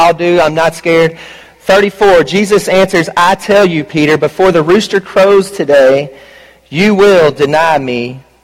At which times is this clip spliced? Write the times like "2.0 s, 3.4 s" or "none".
none